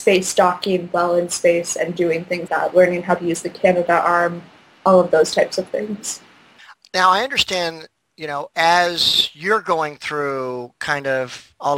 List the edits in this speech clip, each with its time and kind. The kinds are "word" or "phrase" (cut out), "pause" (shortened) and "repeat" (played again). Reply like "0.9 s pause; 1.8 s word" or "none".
2.5 s word